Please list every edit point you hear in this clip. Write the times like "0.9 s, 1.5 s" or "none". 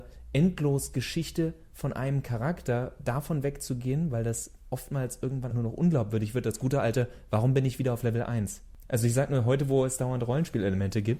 5.5 s